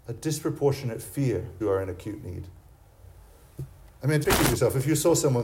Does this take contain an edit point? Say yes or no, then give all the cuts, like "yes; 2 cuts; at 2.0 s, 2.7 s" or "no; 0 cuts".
yes; 2 cuts; at 1.6 s, 4.2 s